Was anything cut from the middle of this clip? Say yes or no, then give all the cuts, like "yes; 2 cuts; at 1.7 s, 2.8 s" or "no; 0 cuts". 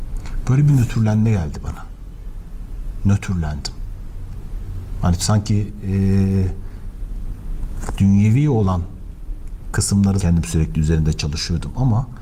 yes; 1 cut; at 10.2 s